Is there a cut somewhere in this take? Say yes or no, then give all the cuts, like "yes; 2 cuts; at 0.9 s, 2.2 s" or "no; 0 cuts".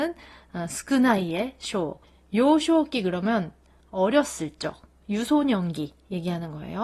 no; 0 cuts